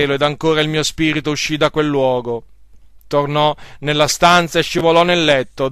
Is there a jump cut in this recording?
no; 0 cuts

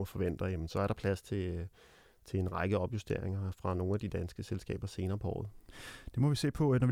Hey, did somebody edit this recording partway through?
no; 0 cuts

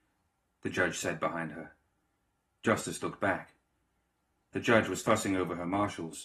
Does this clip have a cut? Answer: no; 0 cuts

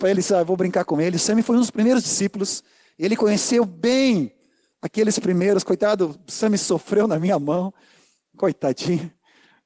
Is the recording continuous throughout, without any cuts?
yes; 0 cuts

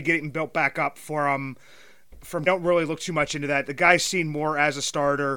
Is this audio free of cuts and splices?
no; 1 cut; at 2.5 s

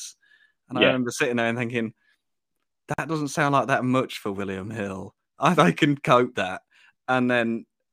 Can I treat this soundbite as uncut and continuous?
no; 2 cuts; at 5.6 s, 6.3 s

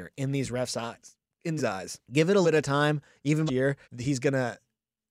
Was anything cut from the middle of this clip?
yes; 5 cuts; at 1.6 s, 2.0 s, 2.4 s, 3.5 s, 3.8 s

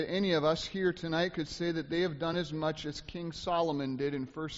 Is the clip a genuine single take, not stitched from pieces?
yes; 0 cuts

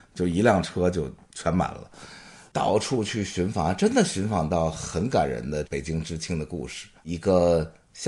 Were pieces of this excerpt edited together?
yes; 1 cut; at 7.0 s

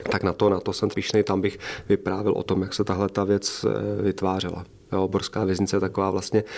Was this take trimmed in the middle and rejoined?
yes; 1 cut; at 0.9 s

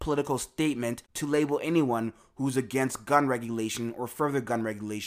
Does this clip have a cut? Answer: no; 0 cuts

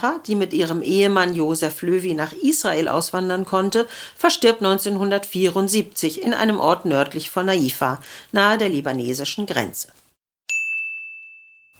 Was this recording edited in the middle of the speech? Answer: no; 0 cuts

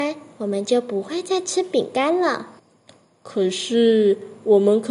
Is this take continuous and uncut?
no; 1 cut; at 2.6 s

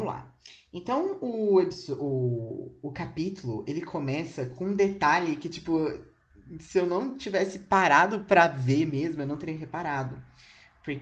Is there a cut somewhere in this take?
no; 0 cuts

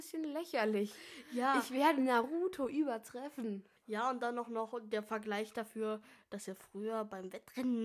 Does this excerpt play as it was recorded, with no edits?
no; 1 cut; at 3.8 s

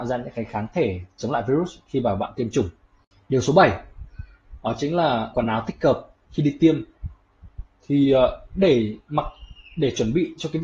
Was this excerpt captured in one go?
no; 1 cut; at 5.3 s

